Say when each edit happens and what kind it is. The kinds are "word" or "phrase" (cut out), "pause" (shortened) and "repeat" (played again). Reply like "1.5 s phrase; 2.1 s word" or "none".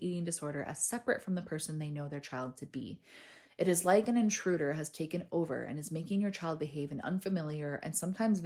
none